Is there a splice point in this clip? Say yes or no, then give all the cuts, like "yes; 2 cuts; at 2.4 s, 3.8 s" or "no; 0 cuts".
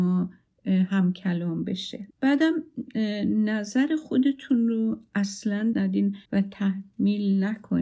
yes; 3 cuts; at 2.1 s, 5.7 s, 6.3 s